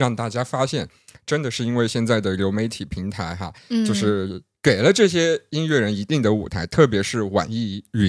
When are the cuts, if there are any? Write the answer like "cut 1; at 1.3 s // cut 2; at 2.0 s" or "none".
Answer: none